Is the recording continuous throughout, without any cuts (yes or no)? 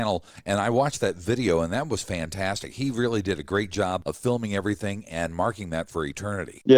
yes